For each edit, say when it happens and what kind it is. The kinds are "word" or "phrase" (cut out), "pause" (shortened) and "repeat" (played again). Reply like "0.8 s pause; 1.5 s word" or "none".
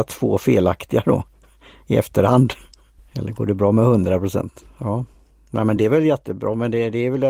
none